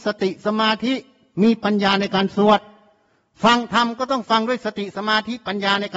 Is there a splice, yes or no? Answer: no